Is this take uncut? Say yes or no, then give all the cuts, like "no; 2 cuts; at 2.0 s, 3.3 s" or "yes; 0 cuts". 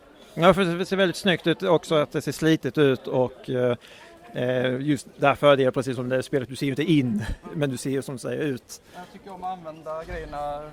yes; 0 cuts